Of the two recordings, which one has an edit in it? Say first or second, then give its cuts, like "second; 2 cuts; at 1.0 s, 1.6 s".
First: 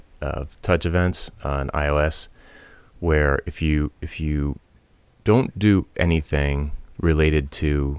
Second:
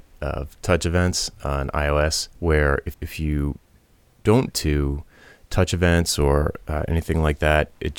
second; 3 cuts; at 2.3 s, 2.9 s, 4.5 s